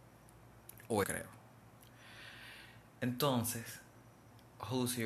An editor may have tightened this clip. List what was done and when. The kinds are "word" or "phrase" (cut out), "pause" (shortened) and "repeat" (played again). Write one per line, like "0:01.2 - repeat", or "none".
0:01.0 - word